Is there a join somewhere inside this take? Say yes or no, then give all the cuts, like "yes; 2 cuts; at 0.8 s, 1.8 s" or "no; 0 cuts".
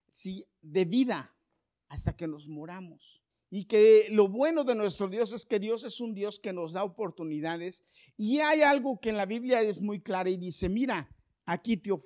yes; 1 cut; at 3.3 s